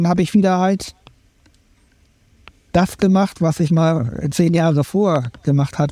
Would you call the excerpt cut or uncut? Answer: uncut